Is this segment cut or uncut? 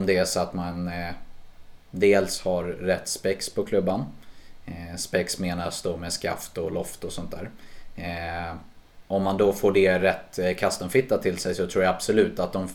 cut